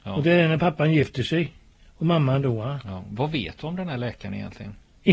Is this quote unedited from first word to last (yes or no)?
yes